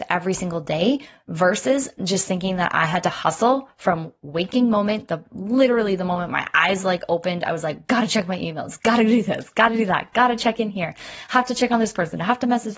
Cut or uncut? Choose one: uncut